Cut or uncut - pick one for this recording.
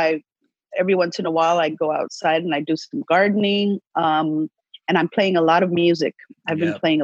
uncut